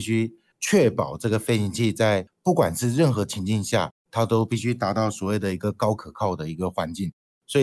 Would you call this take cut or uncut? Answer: uncut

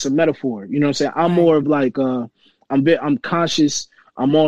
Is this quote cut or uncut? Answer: uncut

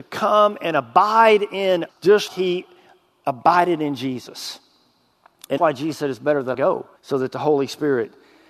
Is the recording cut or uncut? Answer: cut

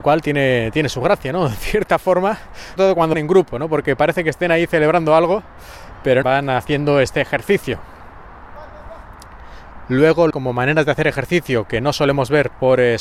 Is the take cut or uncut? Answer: cut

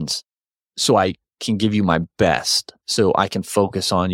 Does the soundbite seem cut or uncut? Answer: uncut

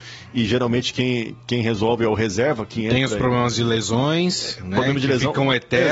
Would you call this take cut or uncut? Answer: uncut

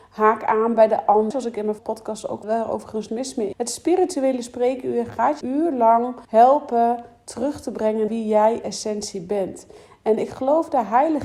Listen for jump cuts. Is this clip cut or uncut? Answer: cut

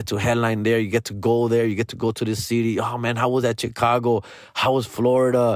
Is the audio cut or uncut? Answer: uncut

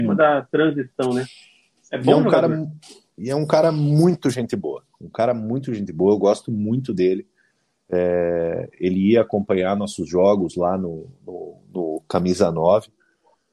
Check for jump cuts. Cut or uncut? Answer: uncut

